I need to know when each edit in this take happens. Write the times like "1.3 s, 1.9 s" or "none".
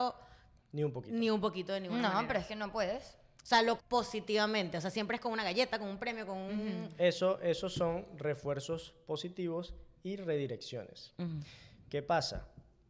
3.8 s